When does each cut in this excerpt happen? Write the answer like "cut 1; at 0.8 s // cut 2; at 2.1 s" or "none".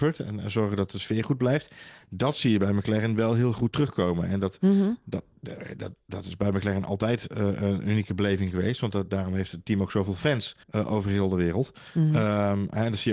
cut 1; at 10.6 s

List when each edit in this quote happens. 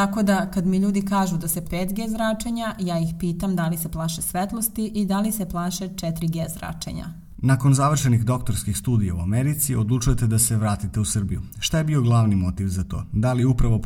cut 1; at 1.6 s

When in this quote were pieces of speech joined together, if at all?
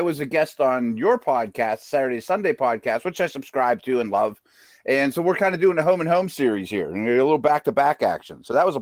none

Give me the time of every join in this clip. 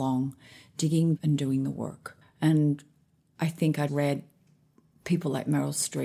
cut 1; at 1.2 s // cut 2; at 2.2 s // cut 3; at 3.9 s

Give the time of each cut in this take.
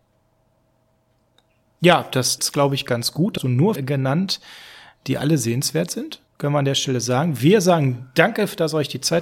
cut 1; at 2.4 s // cut 2; at 3.4 s // cut 3; at 3.8 s // cut 4; at 6.3 s

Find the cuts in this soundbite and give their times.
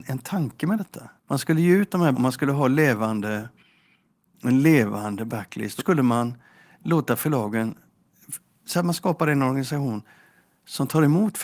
cut 1; at 1.2 s // cut 2; at 2.1 s // cut 3; at 5.8 s

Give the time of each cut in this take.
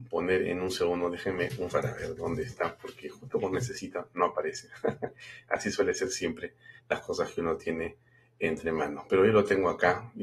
cut 1; at 1.7 s // cut 2; at 3.5 s // cut 3; at 6.8 s

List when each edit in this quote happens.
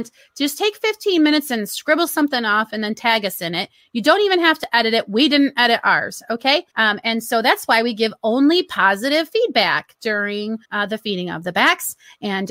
cut 1; at 6.7 s // cut 2; at 10.6 s

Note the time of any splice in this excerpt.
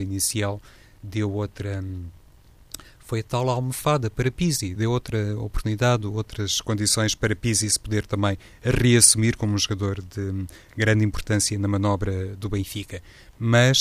cut 1; at 4.8 s

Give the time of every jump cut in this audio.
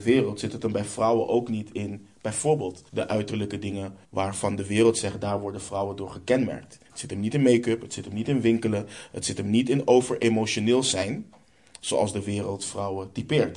cut 1; at 2.9 s // cut 2; at 4.0 s // cut 3; at 6.8 s

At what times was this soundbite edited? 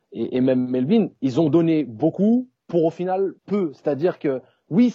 cut 1; at 3.4 s

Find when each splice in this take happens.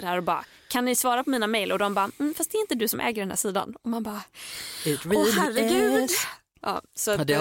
none

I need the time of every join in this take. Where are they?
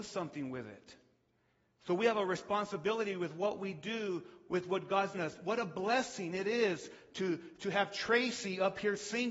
cut 1; at 5.1 s

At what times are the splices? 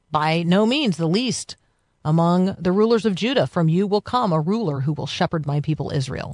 none

